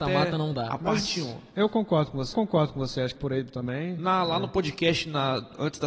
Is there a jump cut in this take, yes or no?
yes